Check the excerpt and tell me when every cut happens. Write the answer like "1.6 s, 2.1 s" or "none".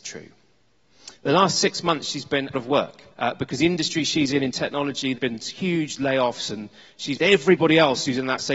2.5 s, 3.1 s, 5.1 s, 7.2 s